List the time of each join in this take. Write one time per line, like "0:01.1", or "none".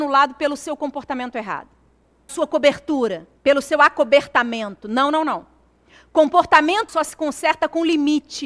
0:02.3
0:03.4
0:06.9